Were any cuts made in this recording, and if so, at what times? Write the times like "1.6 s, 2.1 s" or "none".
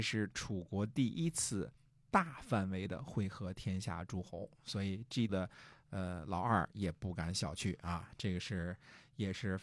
5.3 s